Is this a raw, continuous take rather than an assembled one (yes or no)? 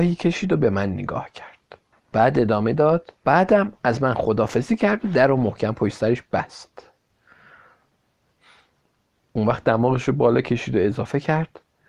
no